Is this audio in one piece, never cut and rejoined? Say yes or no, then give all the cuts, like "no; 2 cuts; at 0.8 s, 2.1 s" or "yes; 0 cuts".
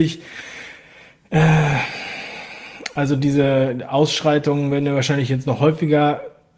yes; 0 cuts